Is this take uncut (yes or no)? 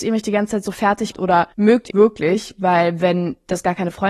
no